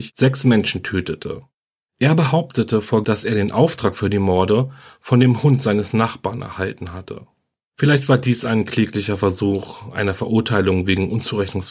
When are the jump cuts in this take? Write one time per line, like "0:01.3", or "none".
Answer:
0:03.0